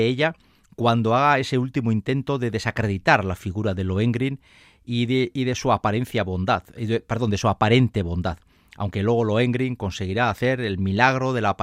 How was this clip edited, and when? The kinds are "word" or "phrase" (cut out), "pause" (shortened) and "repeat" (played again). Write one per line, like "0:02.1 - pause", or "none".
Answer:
none